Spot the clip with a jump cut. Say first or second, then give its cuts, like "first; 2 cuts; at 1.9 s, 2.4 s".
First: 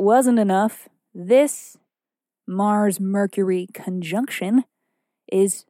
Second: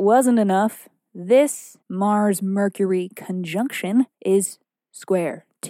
second; 2 cuts; at 1.8 s, 4.1 s